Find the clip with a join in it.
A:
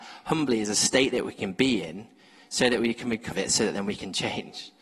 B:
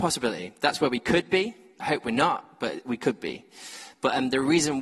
A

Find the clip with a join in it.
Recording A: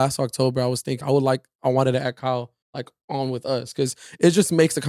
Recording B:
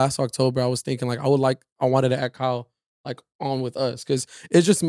A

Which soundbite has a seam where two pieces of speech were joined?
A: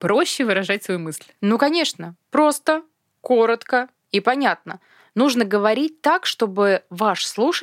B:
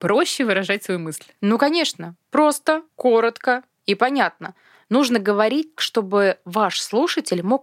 B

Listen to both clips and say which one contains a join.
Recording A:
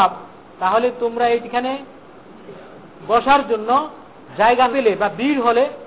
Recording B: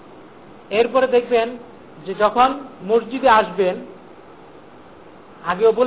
A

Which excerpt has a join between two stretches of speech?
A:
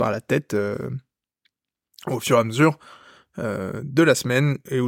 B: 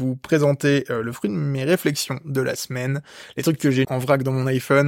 B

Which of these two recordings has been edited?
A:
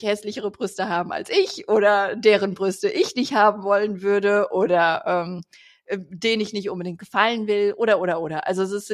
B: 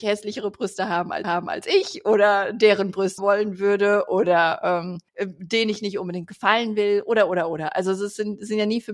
B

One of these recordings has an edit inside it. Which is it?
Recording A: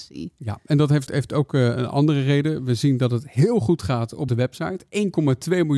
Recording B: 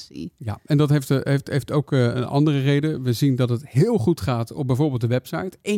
A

